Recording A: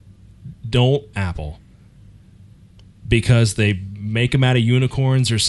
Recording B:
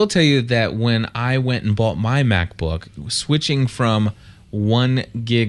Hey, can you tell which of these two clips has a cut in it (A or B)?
A